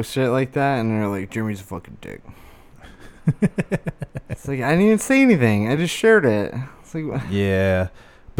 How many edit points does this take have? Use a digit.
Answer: 0